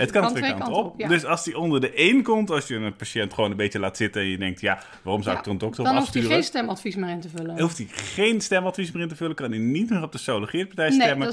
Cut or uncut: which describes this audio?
uncut